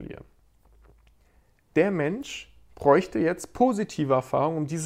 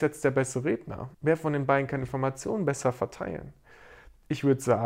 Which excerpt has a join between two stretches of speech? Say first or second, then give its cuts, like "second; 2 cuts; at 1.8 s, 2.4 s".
second; 1 cut; at 1.1 s